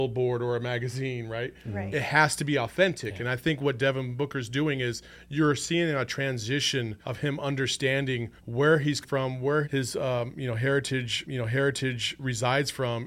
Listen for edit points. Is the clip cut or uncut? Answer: cut